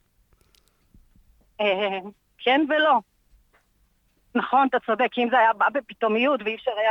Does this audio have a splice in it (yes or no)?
no